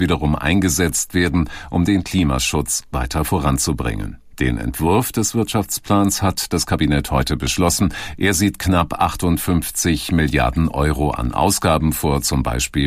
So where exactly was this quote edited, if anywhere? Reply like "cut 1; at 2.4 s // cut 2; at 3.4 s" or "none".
none